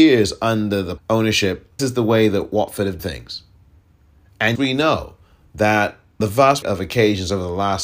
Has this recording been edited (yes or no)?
yes